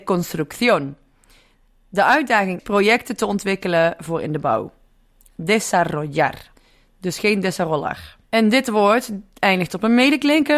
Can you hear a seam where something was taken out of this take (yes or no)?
yes